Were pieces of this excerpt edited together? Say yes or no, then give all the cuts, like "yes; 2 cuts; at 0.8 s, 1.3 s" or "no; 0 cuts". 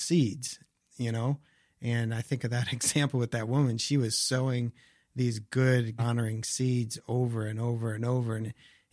yes; 1 cut; at 6.0 s